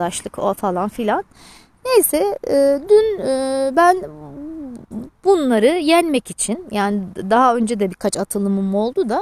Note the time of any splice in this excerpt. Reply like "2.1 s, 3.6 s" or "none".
none